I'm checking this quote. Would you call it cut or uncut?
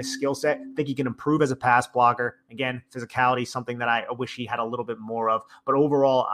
uncut